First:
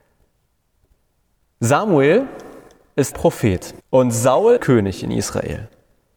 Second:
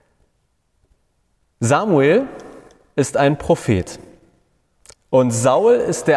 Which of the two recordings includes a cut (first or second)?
first